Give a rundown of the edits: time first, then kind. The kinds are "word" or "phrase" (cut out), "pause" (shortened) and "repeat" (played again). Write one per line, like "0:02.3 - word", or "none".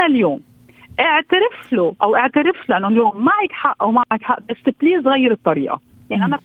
none